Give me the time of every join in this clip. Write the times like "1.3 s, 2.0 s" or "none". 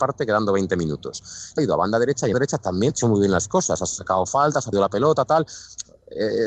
1.6 s, 2.3 s, 2.9 s, 4.7 s